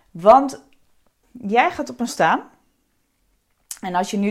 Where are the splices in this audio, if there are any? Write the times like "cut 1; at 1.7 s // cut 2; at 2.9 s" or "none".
cut 1; at 1.2 s // cut 2; at 2.1 s